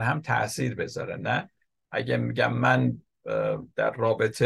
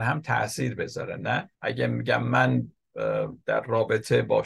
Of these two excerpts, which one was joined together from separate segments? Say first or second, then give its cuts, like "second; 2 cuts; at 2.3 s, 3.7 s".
second; 1 cut; at 1.5 s